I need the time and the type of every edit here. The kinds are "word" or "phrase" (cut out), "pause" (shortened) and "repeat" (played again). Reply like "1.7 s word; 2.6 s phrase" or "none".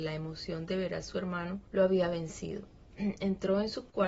1.7 s pause

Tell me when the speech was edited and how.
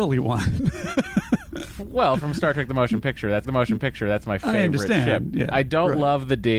3.4 s repeat

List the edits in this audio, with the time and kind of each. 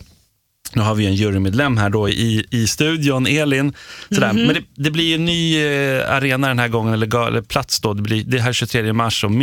none

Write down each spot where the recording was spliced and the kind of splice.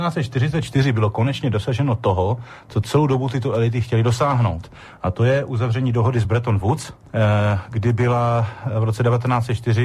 none

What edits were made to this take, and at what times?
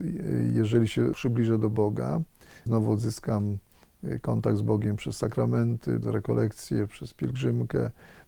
1.1 s word; 2.7 s word; 6.0 s word

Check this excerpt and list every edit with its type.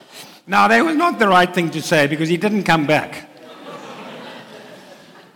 none

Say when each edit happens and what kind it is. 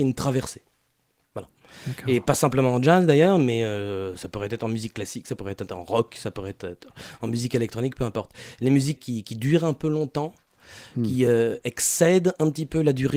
9.0 s word

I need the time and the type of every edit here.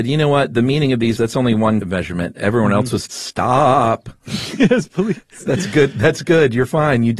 1.2 s word; 1.8 s word; 3.1 s word

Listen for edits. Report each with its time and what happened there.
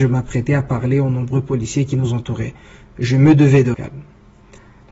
3.7 s word

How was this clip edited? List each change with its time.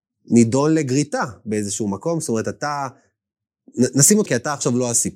4.3 s word

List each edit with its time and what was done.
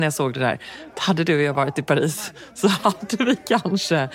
none

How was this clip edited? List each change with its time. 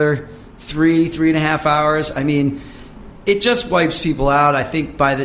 none

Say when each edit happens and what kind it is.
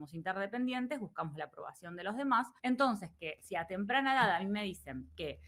2.6 s pause

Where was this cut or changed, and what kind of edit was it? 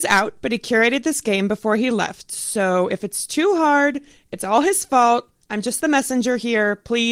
none

